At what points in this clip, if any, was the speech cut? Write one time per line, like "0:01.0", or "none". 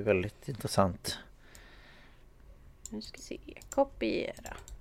0:03.2